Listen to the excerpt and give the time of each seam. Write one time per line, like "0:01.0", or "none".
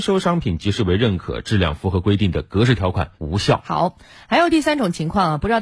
0:03.2